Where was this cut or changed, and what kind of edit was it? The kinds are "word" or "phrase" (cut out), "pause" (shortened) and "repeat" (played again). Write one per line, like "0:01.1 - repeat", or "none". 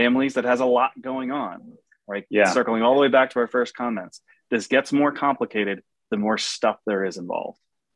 none